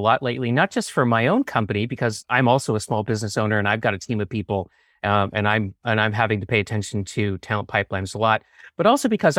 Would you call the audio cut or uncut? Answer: uncut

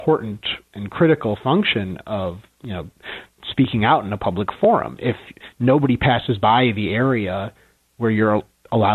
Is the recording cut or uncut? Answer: uncut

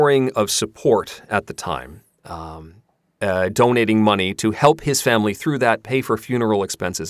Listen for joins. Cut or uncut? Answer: uncut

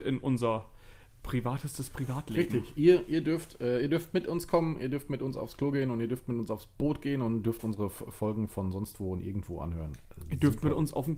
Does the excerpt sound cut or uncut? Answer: uncut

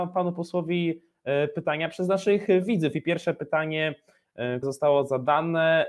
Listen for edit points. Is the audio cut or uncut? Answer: cut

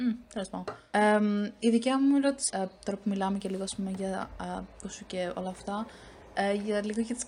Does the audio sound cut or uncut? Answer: cut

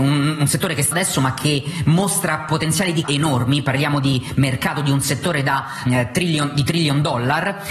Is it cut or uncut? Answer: cut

